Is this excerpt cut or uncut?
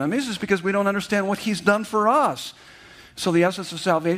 uncut